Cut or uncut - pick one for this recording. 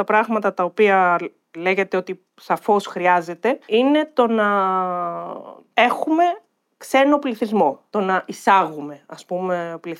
uncut